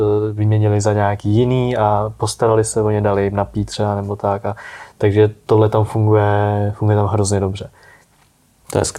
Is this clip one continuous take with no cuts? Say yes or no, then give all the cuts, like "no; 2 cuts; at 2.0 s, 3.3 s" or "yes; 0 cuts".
yes; 0 cuts